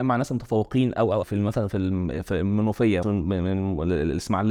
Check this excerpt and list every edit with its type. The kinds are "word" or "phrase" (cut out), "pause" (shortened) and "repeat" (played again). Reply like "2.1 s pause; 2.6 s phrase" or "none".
1.2 s word; 3.0 s word